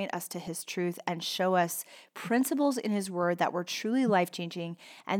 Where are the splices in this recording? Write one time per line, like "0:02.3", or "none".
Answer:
none